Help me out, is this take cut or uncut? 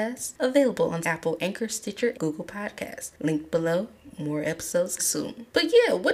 cut